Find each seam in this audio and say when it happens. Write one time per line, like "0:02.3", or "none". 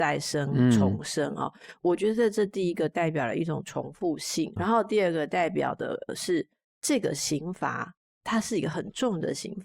0:04.6

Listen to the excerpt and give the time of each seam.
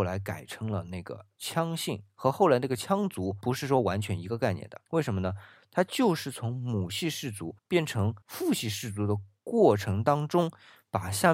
0:04.9
0:07.6
0:08.2

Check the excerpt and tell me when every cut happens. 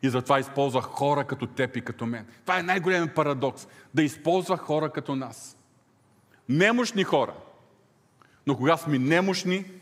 none

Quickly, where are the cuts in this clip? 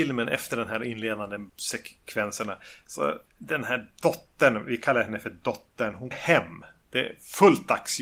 0:01.5
0:06.1

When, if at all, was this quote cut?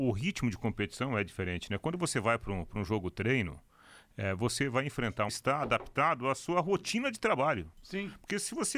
0:05.3

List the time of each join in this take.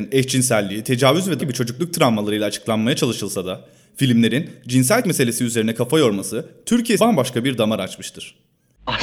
0:01.4
0:05.0
0:07.0

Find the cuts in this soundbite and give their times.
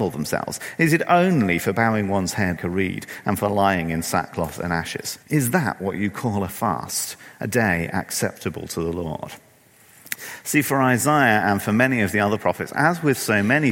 0:02.6
0:05.2

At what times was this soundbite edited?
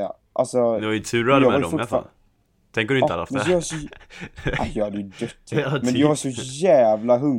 none

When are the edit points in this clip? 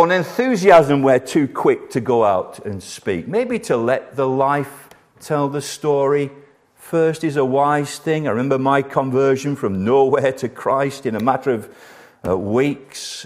none

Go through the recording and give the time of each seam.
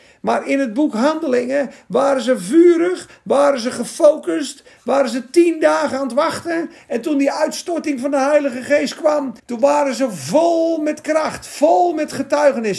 0:09.4

